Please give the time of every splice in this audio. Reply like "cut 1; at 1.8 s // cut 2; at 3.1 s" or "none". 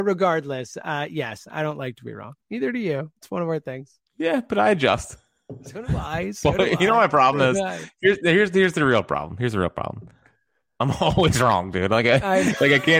cut 1; at 3.2 s // cut 2; at 4.1 s